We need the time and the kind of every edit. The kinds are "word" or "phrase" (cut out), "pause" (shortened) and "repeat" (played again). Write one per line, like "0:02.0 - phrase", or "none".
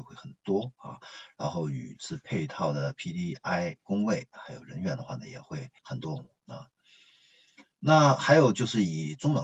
0:05.8 - pause

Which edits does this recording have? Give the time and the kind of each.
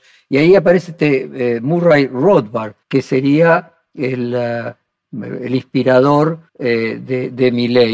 0:02.8 - pause
0:06.5 - pause

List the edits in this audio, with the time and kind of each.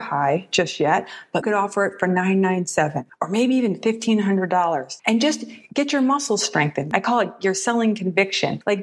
0:01.4 - phrase

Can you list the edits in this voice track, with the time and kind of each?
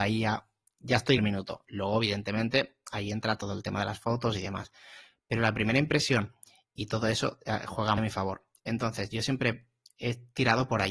0:01.2 - phrase
0:08.0 - word

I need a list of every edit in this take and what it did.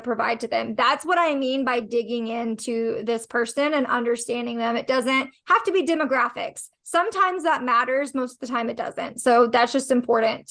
none

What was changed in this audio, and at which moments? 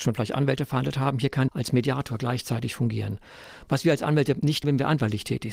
0:01.5 - phrase
0:04.6 - word

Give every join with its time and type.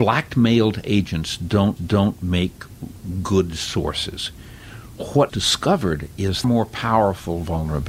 0:01.8 - repeat
0:05.3 - word
0:06.4 - phrase

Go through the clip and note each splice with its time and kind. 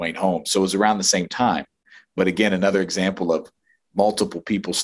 none

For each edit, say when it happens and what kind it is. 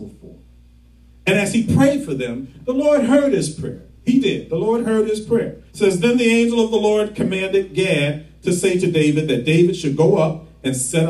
0:05.7 - pause

